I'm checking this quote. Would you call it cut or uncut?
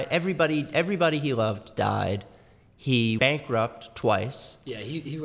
cut